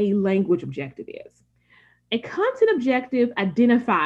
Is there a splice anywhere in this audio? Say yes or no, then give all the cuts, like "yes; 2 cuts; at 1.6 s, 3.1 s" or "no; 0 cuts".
no; 0 cuts